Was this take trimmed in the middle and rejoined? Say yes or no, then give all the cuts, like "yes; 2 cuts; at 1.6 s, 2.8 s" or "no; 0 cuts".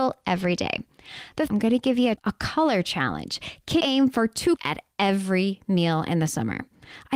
yes; 4 cuts; at 1.5 s, 2.2 s, 3.8 s, 4.6 s